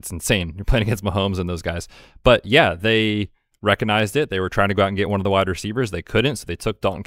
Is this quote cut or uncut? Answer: uncut